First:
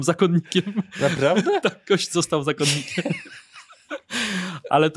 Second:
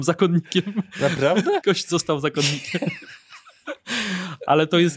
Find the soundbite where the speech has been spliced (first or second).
second